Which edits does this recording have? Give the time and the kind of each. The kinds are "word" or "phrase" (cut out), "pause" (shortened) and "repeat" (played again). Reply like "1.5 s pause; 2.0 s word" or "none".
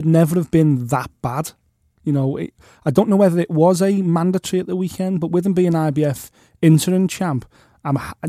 none